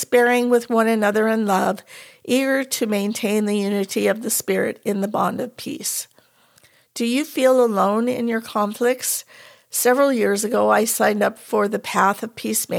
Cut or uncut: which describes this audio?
uncut